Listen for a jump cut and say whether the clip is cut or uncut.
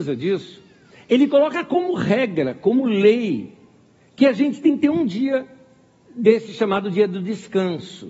uncut